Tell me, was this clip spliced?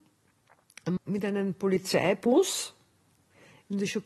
yes; 1 cut; at 1.0 s

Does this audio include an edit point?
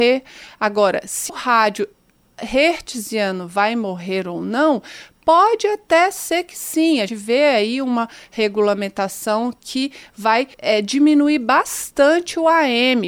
yes; 3 cuts; at 1.3 s, 7.1 s, 10.5 s

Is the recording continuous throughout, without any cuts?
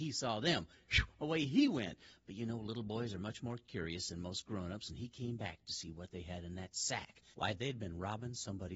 yes; 0 cuts

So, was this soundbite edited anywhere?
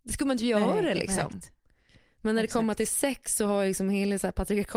no; 0 cuts

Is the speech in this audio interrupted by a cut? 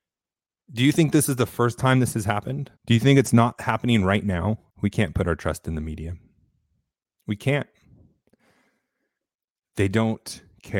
yes; 3 cuts; at 2.8 s, 4.7 s, 6.9 s

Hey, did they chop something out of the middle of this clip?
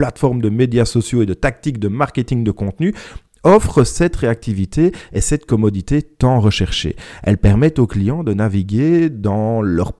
no; 0 cuts

